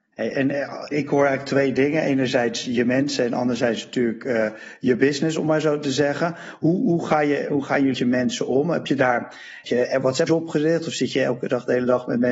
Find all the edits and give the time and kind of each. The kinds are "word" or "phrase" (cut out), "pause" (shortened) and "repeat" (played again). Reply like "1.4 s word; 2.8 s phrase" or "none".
0.9 s word; 7.9 s word; 9.6 s word; 10.3 s word